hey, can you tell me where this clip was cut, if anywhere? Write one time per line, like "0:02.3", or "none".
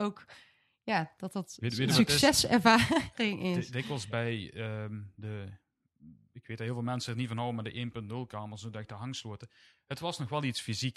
none